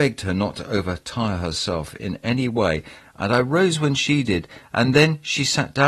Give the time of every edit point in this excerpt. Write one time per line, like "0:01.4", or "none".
none